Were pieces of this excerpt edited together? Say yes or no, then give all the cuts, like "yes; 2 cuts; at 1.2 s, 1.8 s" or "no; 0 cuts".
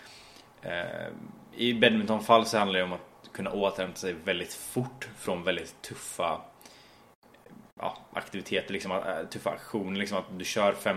no; 0 cuts